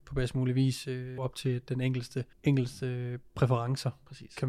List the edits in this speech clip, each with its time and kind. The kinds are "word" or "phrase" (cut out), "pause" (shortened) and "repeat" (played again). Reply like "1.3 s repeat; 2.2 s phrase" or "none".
1.2 s phrase; 2.3 s pause